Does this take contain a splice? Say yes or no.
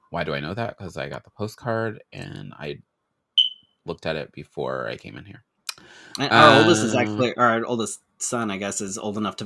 no